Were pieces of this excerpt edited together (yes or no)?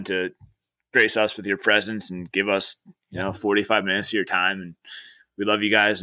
no